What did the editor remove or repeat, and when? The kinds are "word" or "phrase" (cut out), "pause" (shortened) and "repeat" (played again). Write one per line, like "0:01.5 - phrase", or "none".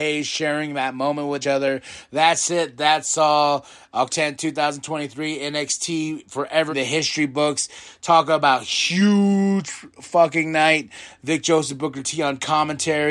0:01.4 - word
0:04.1 - word
0:06.7 - word